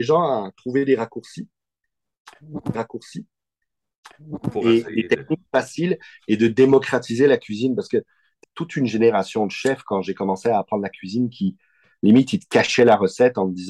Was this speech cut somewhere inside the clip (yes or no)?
yes